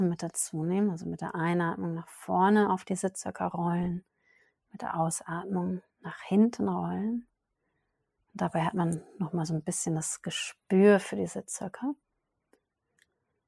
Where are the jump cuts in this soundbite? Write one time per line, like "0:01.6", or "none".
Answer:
0:05.9

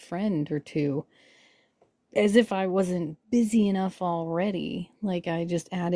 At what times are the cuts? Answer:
0:03.2

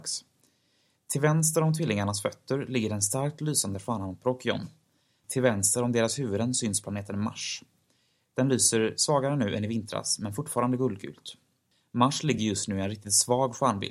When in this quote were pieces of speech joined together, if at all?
none

